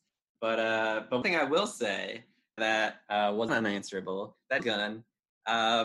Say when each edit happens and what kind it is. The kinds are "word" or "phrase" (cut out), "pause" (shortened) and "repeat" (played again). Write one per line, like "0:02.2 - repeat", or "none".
0:01.2 - word
0:02.6 - word
0:03.5 - word
0:04.6 - word